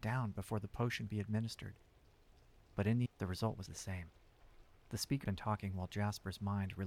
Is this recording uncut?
no; 4 cuts; at 1.1 s, 3.1 s, 3.7 s, 5.2 s

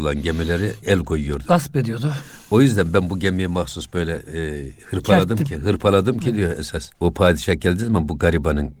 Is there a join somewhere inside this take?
yes; 1 cut; at 6.9 s

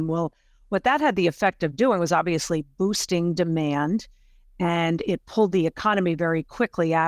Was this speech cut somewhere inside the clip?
no; 0 cuts

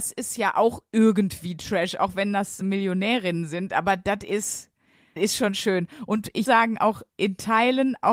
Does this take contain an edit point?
yes; 4 cuts; at 2.6 s, 5.2 s, 6.5 s, 7.1 s

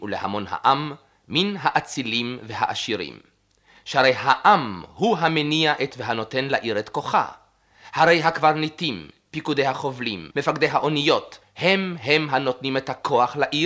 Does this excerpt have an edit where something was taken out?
yes; 3 cuts; at 5.9 s, 10.3 s, 11.4 s

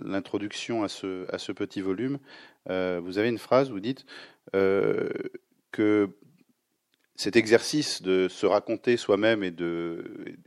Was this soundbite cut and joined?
no; 0 cuts

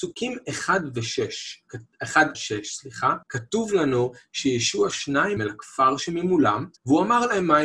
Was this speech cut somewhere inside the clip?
yes; 5 cuts; at 2.3 s, 3.2 s, 4.9 s, 5.4 s, 6.8 s

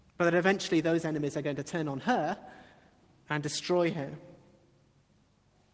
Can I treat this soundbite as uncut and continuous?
yes; 0 cuts

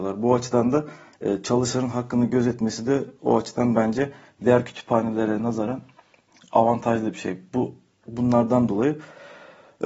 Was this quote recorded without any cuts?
yes; 0 cuts

